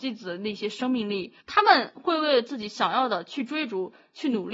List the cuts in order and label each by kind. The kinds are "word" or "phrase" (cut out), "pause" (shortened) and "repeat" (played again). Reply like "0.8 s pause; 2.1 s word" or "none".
1.4 s pause